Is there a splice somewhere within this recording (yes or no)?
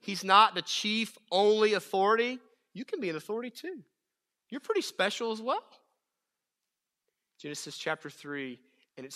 no